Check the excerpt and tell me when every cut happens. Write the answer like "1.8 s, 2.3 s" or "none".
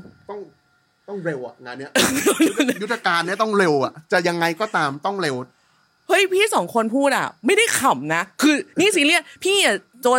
4.0 s